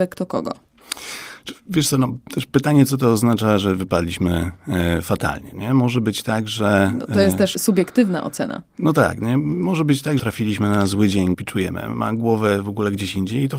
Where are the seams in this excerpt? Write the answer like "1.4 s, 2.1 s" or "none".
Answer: 10.2 s, 11.3 s